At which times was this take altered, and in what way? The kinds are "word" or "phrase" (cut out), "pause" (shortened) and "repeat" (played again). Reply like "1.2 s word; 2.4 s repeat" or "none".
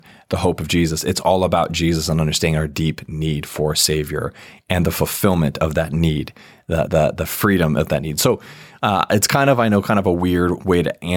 6.9 s word